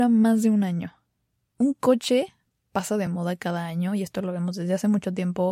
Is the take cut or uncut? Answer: uncut